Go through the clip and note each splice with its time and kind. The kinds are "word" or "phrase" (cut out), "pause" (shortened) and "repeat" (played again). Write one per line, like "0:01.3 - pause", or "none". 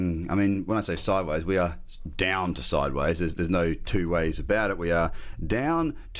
none

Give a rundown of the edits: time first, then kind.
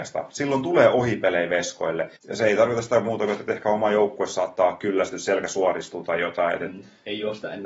0:02.2 - pause

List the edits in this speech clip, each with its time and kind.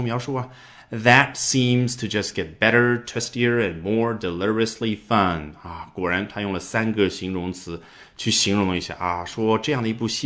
none

